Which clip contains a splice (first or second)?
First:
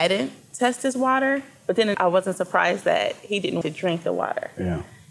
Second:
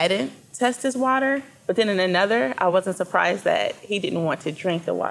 first